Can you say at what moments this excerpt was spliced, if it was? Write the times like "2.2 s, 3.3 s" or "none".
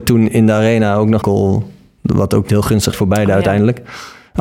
1.2 s, 2.5 s, 2.9 s